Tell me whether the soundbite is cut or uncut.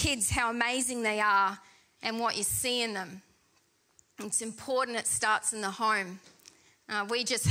uncut